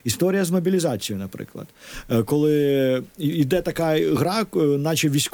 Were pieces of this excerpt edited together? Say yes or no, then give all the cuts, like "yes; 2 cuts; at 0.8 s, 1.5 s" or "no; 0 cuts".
no; 0 cuts